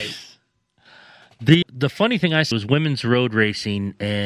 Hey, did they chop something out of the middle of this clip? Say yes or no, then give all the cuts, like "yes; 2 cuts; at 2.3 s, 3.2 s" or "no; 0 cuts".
yes; 2 cuts; at 1.6 s, 2.5 s